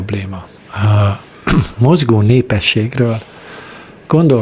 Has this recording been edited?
no; 0 cuts

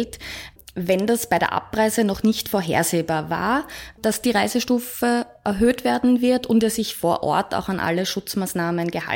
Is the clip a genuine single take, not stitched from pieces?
yes; 0 cuts

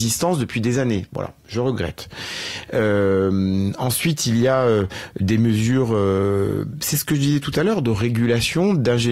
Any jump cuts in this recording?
no; 0 cuts

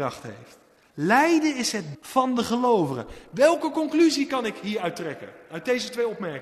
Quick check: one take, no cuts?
no; 1 cut; at 1.9 s

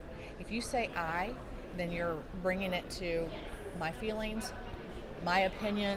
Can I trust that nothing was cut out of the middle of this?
yes; 0 cuts

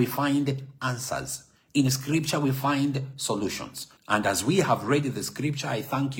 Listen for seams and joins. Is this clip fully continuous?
no; 1 cut; at 4.0 s

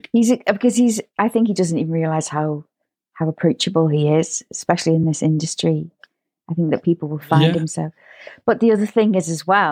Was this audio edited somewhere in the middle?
no; 0 cuts

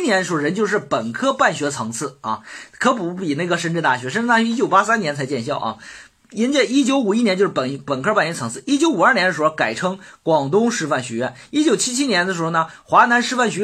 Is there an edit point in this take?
no; 0 cuts

